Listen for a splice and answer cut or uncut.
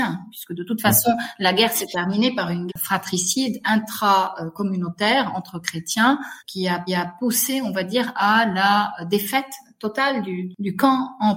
cut